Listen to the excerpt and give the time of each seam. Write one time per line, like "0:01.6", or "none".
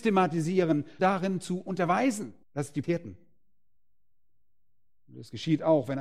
0:01.0
0:02.4
0:02.8